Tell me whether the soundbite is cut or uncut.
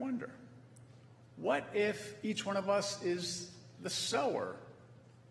uncut